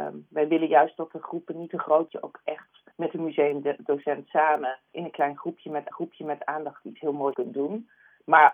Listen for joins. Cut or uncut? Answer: cut